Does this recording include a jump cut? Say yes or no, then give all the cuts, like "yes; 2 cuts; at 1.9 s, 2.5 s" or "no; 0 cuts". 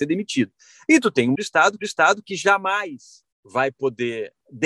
yes; 3 cuts; at 1.4 s, 1.8 s, 3.3 s